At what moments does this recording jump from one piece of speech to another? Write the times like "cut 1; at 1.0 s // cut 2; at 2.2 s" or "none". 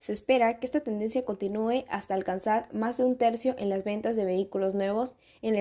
none

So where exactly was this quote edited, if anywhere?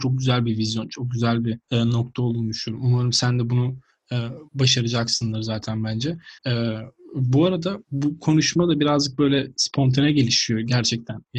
cut 1; at 1.6 s // cut 2; at 4.5 s // cut 3; at 6.4 s // cut 4; at 7.8 s

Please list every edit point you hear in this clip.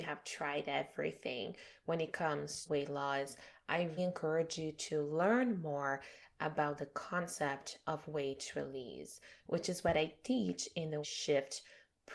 cut 1; at 2.7 s // cut 2; at 4.0 s // cut 3; at 11.0 s

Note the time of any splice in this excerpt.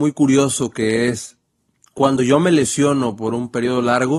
none

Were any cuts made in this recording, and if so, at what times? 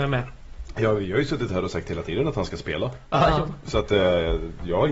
none

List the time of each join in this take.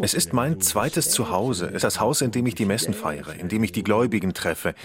cut 1; at 1.8 s

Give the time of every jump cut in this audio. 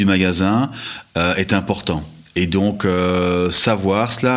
none

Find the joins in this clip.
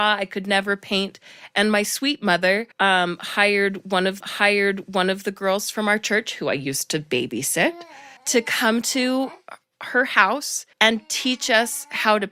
cut 1; at 2.7 s // cut 2; at 4.2 s // cut 3; at 8.2 s // cut 4; at 10.7 s

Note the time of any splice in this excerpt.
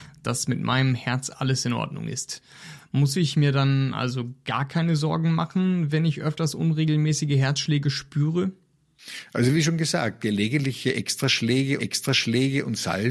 cut 1; at 11.8 s

